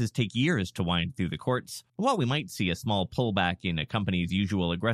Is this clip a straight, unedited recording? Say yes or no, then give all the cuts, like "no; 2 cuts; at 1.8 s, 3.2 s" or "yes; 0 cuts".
no; 1 cut; at 1.9 s